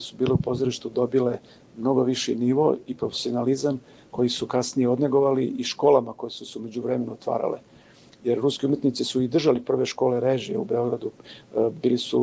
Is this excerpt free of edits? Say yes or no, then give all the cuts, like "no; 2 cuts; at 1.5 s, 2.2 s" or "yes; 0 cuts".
yes; 0 cuts